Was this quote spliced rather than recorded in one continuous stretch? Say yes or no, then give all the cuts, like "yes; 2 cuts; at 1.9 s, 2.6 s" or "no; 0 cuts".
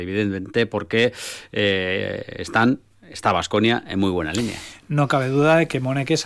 no; 0 cuts